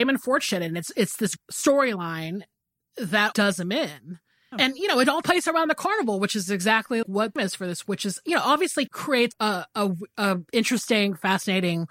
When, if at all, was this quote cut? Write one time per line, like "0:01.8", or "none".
0:01.4
0:03.3
0:04.5
0:05.2
0:07.0
0:07.4
0:07.8
0:08.9
0:09.3

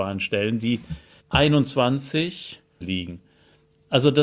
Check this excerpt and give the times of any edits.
0:01.2
0:02.8

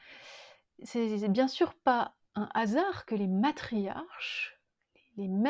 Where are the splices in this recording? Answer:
none

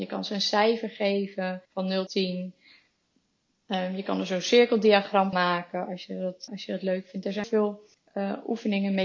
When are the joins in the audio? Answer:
0:01.6
0:02.1
0:05.3
0:06.5
0:07.4
0:07.9

